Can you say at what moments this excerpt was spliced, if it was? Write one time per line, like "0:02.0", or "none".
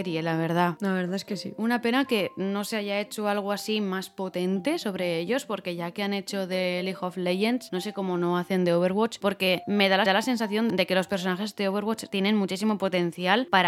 0:10.1